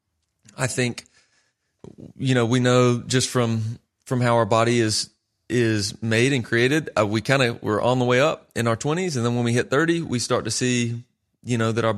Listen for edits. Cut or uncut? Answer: uncut